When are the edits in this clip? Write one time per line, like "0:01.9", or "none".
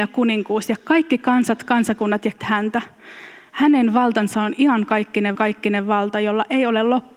0:02.4
0:05.3